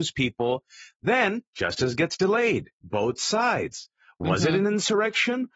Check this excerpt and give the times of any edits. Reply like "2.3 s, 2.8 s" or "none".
1.5 s, 2.7 s